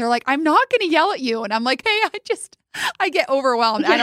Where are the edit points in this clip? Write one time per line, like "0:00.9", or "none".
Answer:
0:01.8